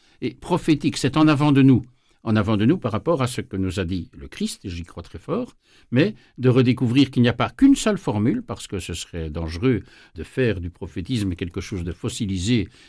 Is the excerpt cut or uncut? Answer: uncut